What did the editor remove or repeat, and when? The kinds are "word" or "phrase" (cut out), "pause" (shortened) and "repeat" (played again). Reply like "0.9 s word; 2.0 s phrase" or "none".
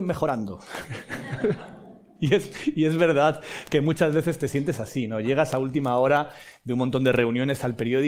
none